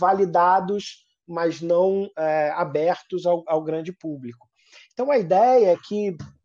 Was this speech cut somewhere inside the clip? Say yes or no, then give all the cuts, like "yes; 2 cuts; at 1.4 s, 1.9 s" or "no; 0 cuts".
no; 0 cuts